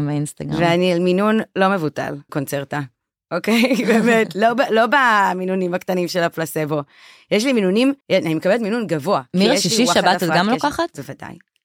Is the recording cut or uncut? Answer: cut